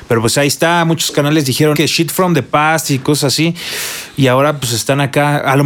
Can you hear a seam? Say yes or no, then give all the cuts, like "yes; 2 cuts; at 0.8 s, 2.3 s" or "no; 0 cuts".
yes; 1 cut; at 1.7 s